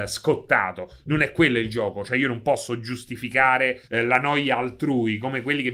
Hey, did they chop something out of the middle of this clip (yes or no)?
yes